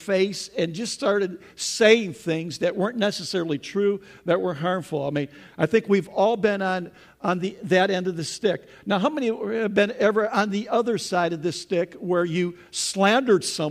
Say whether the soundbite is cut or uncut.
uncut